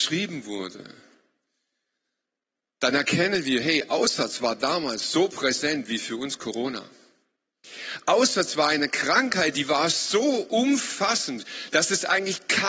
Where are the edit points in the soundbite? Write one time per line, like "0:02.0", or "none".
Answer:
none